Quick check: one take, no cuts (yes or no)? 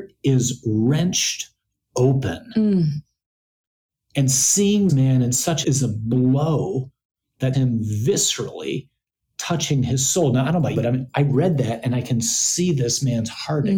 no